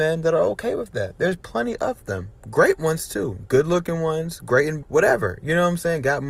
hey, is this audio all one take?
no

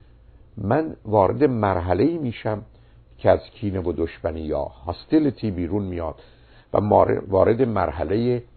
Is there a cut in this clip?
no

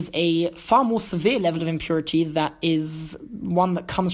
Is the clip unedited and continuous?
yes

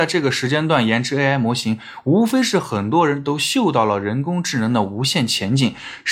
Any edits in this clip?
no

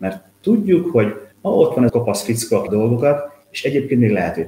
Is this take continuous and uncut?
no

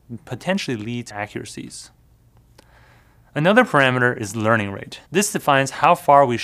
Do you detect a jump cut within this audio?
yes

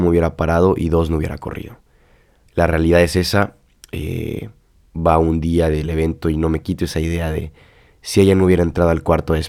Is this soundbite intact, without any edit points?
yes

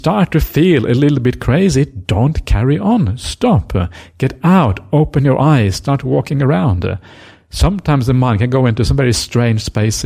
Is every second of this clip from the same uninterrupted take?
yes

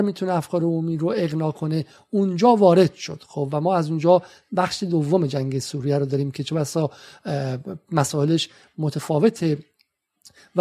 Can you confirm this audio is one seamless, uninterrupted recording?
yes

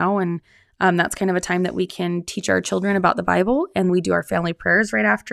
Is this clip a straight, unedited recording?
no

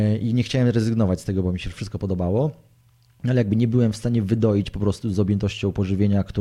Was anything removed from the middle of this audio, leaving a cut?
yes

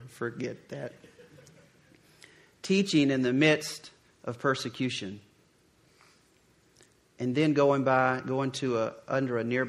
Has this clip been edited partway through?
no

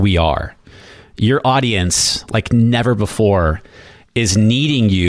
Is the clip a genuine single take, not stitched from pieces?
yes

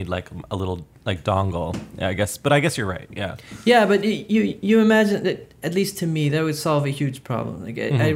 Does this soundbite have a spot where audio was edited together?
yes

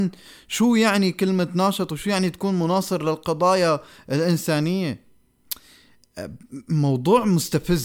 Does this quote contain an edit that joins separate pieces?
no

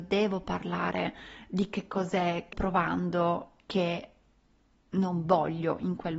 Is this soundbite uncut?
no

